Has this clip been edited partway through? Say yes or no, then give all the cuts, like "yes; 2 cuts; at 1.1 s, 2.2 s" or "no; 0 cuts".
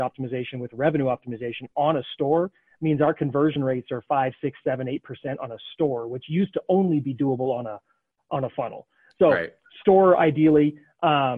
no; 0 cuts